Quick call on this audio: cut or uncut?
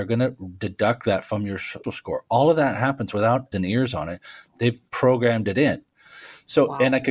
cut